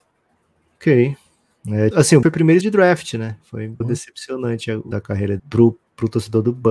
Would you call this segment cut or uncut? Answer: cut